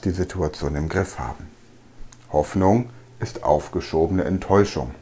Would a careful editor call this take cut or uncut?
uncut